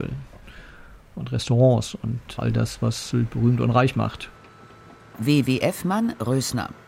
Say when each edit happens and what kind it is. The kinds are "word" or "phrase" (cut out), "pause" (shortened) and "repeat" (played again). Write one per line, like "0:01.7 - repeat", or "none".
none

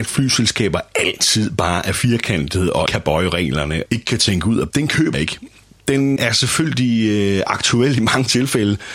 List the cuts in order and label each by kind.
0:02.9 - word
0:03.9 - word
0:04.7 - word
0:05.1 - word
0:06.2 - word

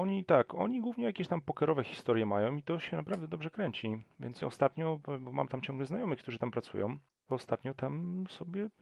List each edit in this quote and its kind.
0:04.4 - word
0:07.1 - pause

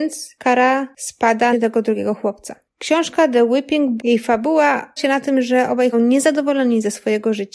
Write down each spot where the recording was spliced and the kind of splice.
0:01.5 - phrase
0:02.7 - pause
0:04.0 - word
0:05.0 - word
0:05.9 - phrase

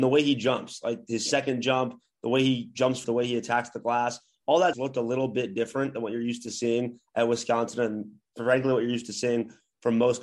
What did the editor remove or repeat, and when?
0:03.0 - word
0:04.7 - phrase

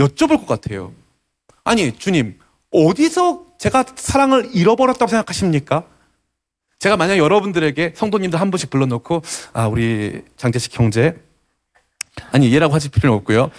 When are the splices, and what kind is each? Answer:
none

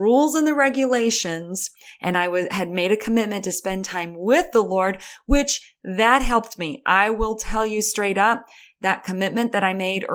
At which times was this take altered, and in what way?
none

